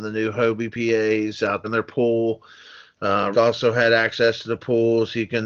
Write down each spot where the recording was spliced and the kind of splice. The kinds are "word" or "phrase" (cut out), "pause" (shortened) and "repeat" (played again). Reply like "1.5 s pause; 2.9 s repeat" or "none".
1.6 s word; 3.3 s phrase